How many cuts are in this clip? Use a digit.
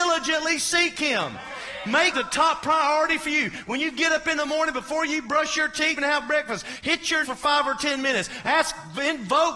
3